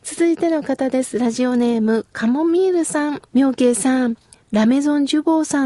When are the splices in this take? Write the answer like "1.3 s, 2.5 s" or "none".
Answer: 3.3 s

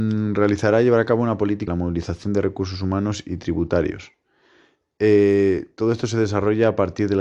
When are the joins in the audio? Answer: 1.7 s

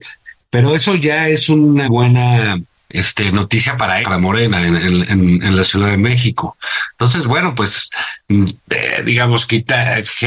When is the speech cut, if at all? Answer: 1.8 s, 4.0 s

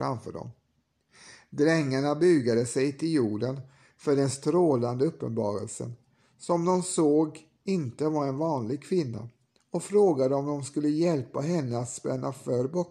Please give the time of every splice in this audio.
none

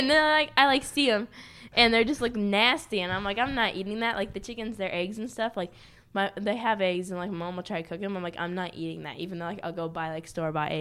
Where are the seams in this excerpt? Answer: none

